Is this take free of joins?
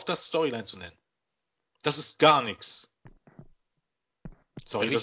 yes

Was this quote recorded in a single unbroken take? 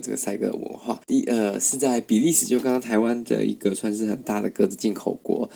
no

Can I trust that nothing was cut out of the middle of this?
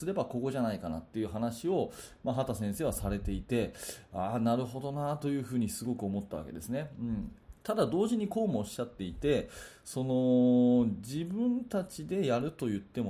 no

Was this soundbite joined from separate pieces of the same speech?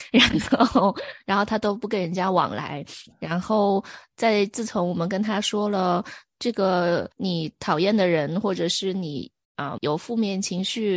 yes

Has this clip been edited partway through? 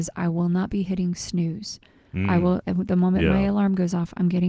no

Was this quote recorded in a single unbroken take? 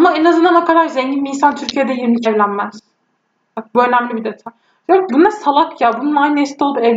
no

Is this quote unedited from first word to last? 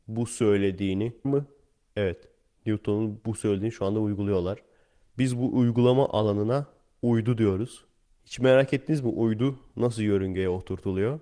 no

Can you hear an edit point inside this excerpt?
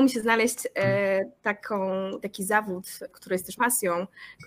yes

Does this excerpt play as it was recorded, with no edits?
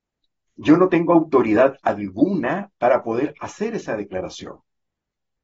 yes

